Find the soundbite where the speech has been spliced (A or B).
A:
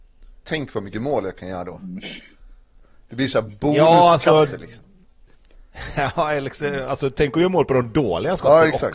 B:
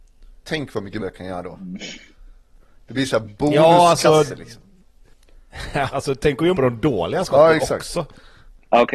B